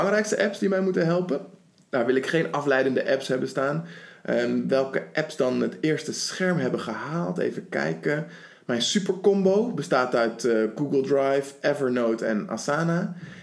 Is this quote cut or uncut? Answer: uncut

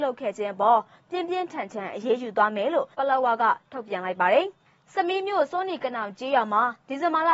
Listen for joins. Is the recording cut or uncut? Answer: cut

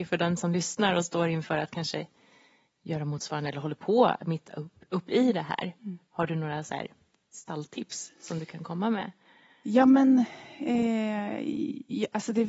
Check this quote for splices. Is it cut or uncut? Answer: uncut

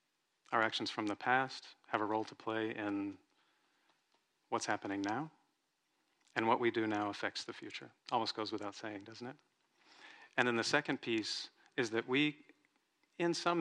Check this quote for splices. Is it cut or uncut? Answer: cut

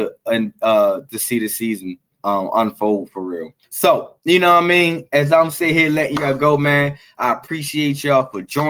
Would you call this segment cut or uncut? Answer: cut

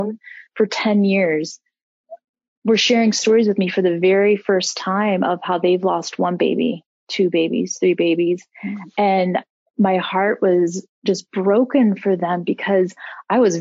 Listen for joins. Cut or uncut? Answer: uncut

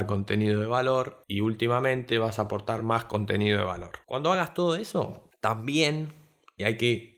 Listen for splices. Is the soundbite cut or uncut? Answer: uncut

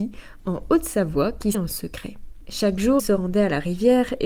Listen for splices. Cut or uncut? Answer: cut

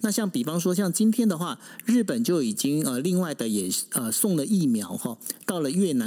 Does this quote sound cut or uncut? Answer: uncut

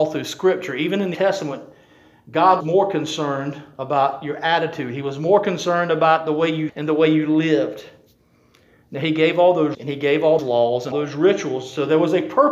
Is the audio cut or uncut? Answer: cut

